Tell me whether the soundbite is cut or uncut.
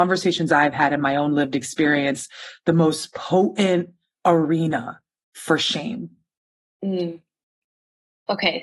uncut